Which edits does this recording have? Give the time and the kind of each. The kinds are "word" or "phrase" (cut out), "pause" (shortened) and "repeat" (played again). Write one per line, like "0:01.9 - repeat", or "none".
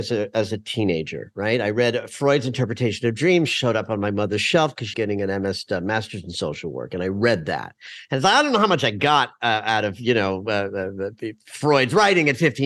0:04.9 - word

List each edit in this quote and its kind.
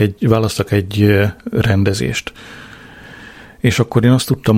none

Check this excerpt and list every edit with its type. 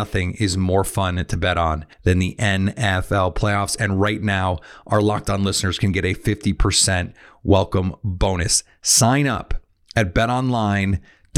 0:01.9 - pause

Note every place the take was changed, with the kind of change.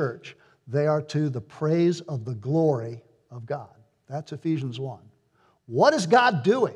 none

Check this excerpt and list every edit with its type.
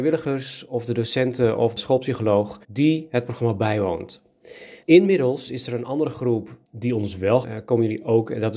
0:01.8 - word
0:02.6 - pause
0:04.8 - pause
0:06.6 - pause
0:07.4 - phrase

